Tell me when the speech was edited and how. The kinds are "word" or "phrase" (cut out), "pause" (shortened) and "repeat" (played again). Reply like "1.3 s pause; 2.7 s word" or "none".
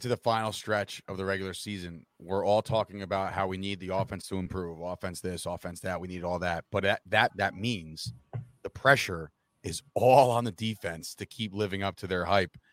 7.3 s word